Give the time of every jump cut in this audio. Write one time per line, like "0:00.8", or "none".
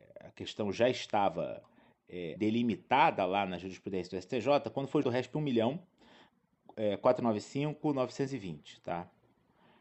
0:02.4
0:05.0